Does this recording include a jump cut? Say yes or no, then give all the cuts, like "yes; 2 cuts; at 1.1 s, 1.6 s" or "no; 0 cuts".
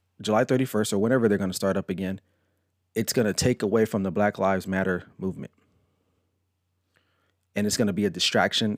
no; 0 cuts